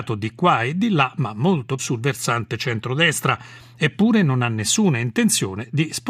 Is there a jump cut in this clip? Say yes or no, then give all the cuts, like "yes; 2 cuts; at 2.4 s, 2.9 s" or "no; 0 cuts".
yes; 1 cut; at 1.8 s